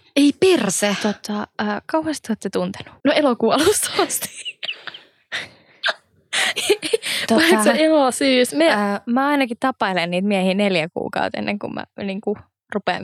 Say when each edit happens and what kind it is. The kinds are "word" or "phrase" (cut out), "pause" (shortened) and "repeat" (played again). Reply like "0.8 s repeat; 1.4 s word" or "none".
3.0 s pause